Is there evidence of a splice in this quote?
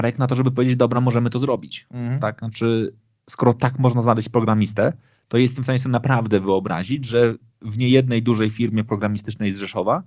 no; 0 cuts

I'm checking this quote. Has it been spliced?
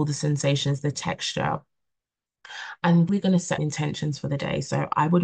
yes; 2 cuts; at 3.1 s, 3.6 s

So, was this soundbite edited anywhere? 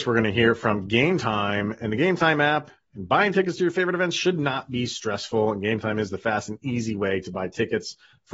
no; 0 cuts

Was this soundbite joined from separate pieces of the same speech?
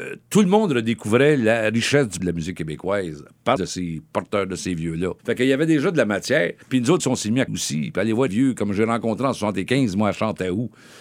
yes; 7 cuts; at 2.2 s, 3.6 s, 5.2 s, 6.6 s, 7.0 s, 7.5 s, 8.3 s

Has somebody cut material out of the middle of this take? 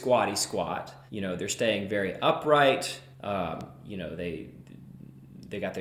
yes; 2 cuts; at 1.1 s, 3.1 s

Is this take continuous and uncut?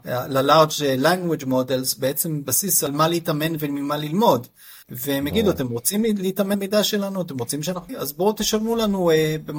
no; 3 cuts; at 4.8 s, 6.5 s, 7.9 s

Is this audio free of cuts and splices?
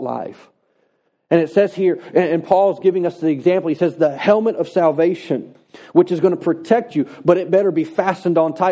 yes; 0 cuts

